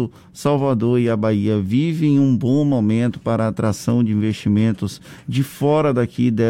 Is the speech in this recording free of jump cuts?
yes; 0 cuts

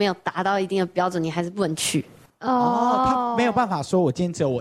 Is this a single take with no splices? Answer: yes; 0 cuts

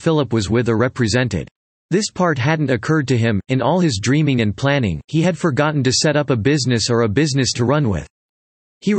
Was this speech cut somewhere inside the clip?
yes; 2 cuts; at 1.6 s, 7.5 s

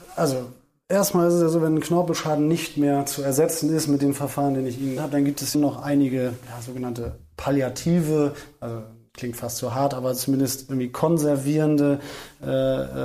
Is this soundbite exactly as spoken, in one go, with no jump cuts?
no; 2 cuts; at 5.0 s, 5.5 s

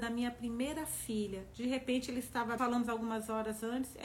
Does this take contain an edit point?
yes; 1 cut; at 2.6 s

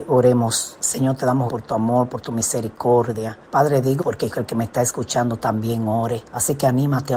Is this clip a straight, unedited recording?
no; 5 cuts; at 1.5 s, 3.5 s, 4.0 s, 4.3 s, 6.3 s

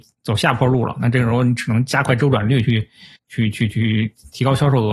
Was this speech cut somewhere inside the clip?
yes; 1 cut; at 3.1 s

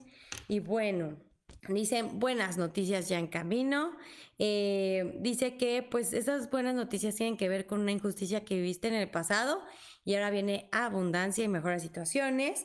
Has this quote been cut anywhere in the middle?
yes; 1 cut; at 1.6 s

